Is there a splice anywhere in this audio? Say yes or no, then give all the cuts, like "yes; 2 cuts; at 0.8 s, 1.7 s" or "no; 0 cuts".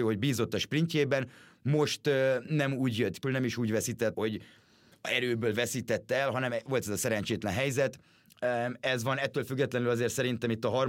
yes; 2 cuts; at 3.2 s, 4.1 s